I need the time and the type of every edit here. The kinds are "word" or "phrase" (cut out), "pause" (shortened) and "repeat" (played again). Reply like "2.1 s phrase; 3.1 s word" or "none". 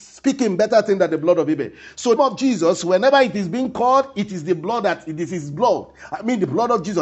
2.2 s phrase

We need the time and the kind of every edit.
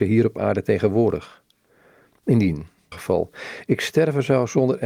2.9 s phrase

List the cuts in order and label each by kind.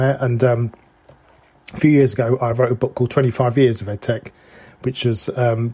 none

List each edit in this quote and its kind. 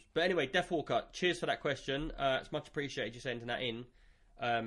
none

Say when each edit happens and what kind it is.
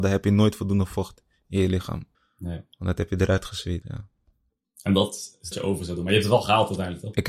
2.1 s pause; 3.8 s word; 5.5 s phrase

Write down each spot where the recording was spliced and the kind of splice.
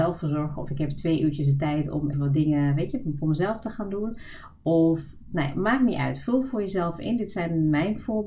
2.1 s word; 5.3 s word

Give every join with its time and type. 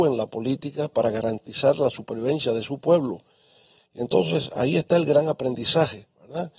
none

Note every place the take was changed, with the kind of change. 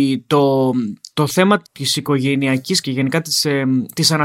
1.6 s word; 2.8 s word

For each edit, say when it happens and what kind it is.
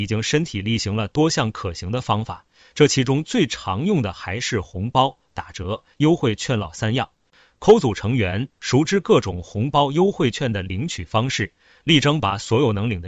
none

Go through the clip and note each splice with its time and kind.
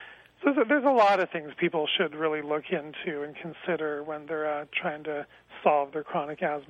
none

